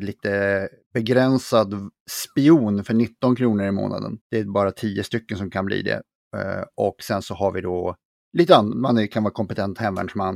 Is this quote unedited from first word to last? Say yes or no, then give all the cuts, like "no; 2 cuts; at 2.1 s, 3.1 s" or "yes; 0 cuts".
no; 2 cuts; at 4.2 s, 8.2 s